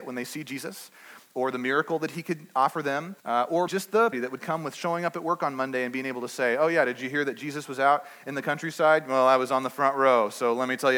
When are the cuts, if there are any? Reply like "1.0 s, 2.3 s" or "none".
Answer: 3.2 s, 3.7 s, 4.1 s